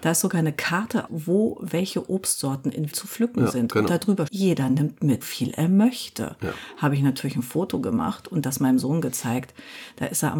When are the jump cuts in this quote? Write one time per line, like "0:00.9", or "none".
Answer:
0:01.1
0:02.9
0:04.3
0:05.2

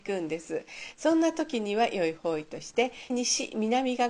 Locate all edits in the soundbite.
0:03.1

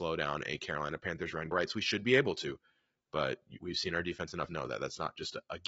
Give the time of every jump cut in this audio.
0:01.5
0:04.5

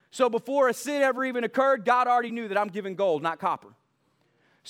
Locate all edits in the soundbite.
none

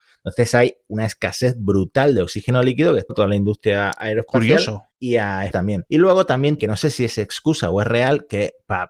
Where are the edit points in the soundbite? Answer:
0:03.1
0:04.9
0:05.5
0:06.6

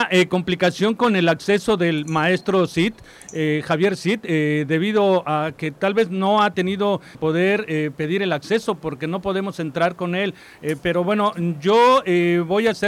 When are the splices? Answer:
0:07.1

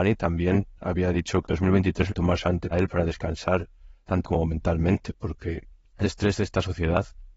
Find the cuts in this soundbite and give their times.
0:01.4
0:02.1
0:02.7
0:04.2
0:06.0

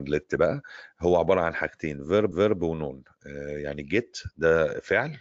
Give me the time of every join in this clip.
0:02.3

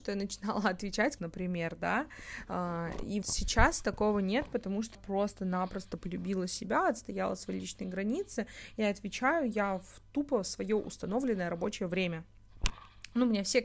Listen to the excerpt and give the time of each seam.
0:01.2
0:03.2
0:04.9

